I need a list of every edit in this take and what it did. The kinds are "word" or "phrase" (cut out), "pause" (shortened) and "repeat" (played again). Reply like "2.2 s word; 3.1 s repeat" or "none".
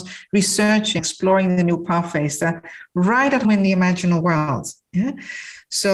1.0 s word; 3.4 s word

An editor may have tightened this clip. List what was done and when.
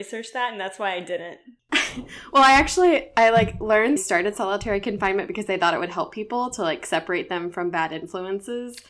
4.0 s phrase

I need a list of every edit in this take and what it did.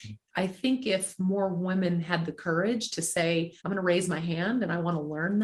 3.6 s pause

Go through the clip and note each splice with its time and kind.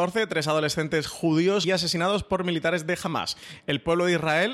1.6 s phrase

